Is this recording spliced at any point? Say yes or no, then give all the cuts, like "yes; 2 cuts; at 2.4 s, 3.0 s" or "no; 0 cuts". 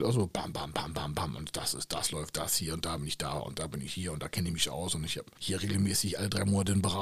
no; 0 cuts